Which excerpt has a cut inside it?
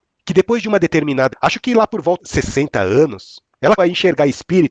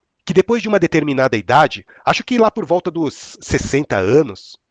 first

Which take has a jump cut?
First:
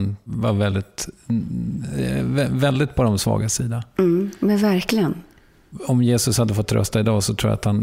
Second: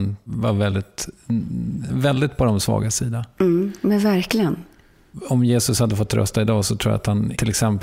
second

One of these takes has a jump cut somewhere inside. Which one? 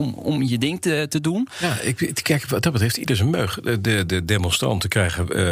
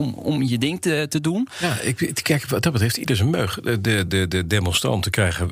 first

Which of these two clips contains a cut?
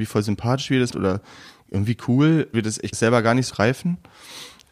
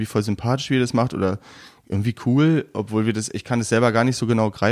first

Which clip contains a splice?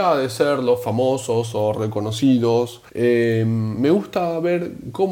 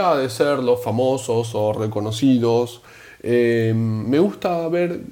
first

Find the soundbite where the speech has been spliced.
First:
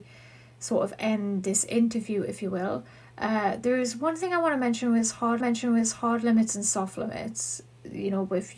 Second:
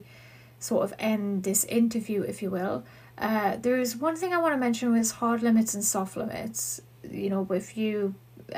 first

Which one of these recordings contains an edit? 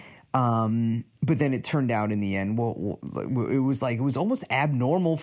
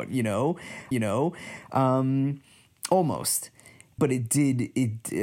second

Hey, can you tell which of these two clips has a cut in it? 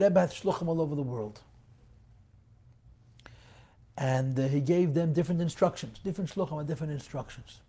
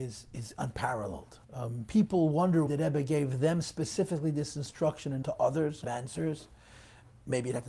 second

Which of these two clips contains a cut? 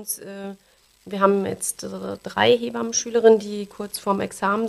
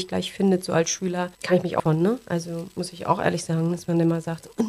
second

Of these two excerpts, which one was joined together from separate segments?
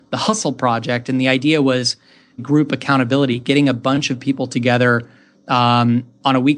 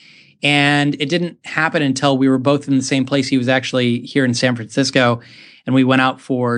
first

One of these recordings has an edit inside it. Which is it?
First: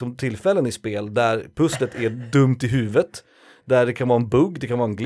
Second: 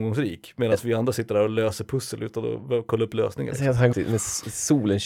second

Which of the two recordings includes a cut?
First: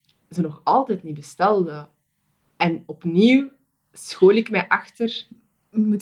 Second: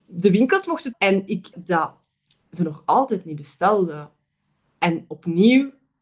second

